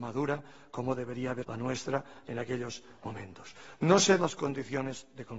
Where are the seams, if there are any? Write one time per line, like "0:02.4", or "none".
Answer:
0:01.4
0:04.2